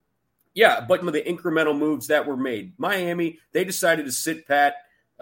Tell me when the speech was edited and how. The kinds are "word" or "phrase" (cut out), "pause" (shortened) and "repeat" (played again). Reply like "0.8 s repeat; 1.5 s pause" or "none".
1.0 s phrase